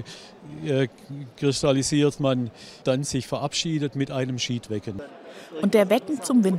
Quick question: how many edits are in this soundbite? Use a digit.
2